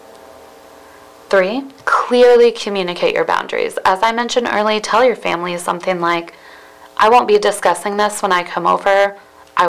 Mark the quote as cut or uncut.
uncut